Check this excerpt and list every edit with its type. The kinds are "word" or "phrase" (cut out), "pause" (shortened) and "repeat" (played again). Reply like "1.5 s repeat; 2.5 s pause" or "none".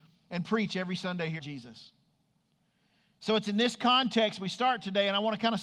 1.4 s word